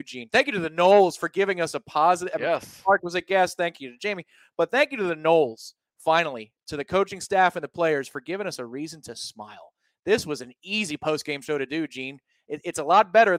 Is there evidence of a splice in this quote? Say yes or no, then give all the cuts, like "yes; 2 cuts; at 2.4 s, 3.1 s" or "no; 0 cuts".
no; 0 cuts